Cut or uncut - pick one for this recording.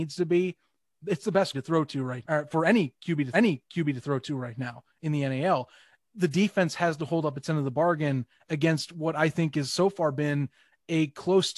cut